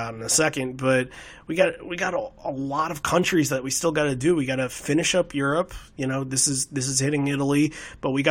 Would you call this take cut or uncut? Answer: uncut